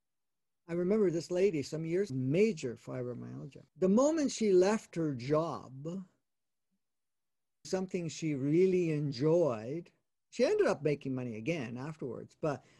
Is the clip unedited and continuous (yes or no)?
no